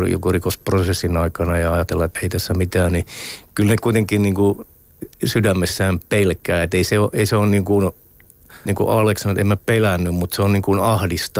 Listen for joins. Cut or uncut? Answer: cut